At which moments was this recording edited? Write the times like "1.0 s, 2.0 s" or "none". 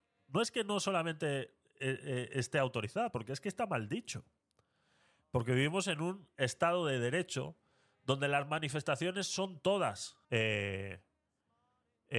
10.2 s

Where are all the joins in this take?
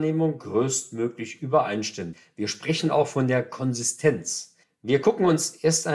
4.6 s

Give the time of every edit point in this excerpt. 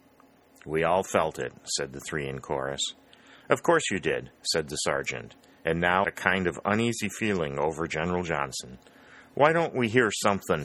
6.0 s

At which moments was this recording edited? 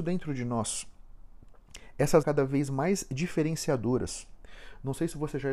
2.2 s

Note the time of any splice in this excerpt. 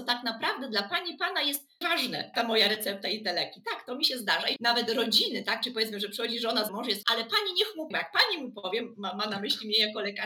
1.8 s, 2.3 s, 4.6 s, 6.7 s, 7.0 s, 7.9 s

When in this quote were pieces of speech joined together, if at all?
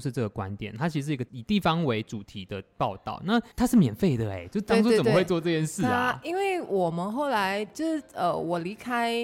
3.5 s

